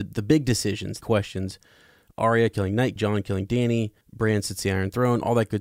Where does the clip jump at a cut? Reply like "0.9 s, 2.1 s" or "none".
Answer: 1.0 s, 3.0 s, 4.0 s